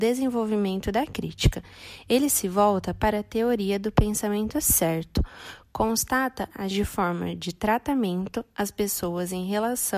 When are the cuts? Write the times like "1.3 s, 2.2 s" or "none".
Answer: 6.7 s